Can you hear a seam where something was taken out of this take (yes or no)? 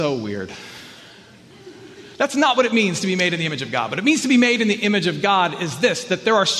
yes